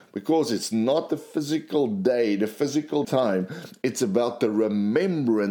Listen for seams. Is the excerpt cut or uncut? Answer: cut